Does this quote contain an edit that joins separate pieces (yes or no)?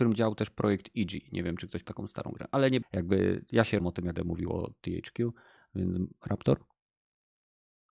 yes